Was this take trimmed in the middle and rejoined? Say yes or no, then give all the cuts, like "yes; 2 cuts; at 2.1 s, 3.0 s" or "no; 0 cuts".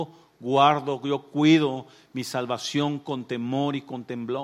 no; 0 cuts